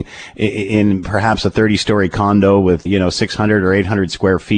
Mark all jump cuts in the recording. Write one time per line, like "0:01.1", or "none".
0:02.9